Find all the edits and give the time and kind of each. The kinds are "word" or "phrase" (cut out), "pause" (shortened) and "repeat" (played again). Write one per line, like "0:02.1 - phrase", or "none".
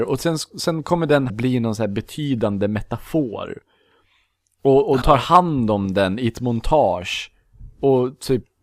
0:01.3 - phrase
0:05.0 - word